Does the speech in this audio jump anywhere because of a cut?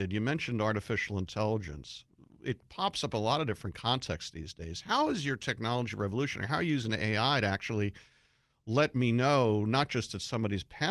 no; 0 cuts

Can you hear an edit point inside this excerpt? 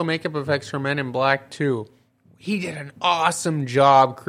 no; 0 cuts

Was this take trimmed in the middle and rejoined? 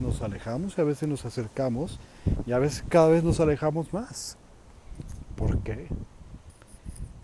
no; 0 cuts

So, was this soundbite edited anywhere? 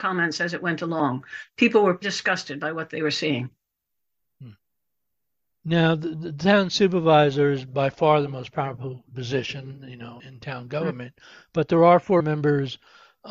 yes; 3 cuts; at 2.0 s, 10.2 s, 12.2 s

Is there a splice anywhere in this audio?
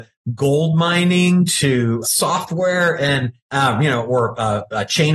yes; 2 cuts; at 2.0 s, 3.4 s

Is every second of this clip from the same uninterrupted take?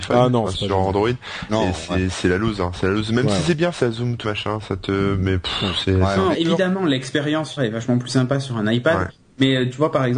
no; 4 cuts; at 3.7 s, 4.2 s, 6.3 s, 7.6 s

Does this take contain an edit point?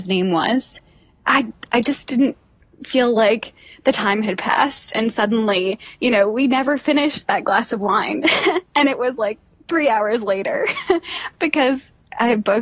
no; 0 cuts

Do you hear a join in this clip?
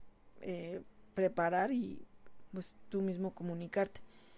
no; 0 cuts

